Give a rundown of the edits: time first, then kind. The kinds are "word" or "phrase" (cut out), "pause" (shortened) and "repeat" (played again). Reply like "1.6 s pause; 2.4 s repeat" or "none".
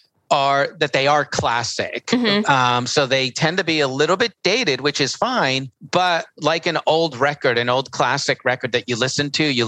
none